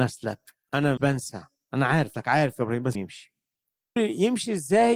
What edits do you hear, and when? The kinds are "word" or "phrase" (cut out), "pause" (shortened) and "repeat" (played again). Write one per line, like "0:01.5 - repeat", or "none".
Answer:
0:01.0 - word
0:02.1 - word
0:02.9 - word
0:04.0 - word